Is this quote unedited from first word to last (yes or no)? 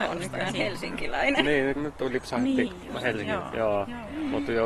no